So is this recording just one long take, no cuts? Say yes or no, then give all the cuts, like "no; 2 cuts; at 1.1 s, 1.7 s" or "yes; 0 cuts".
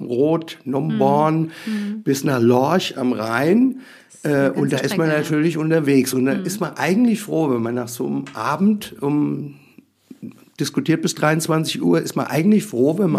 yes; 0 cuts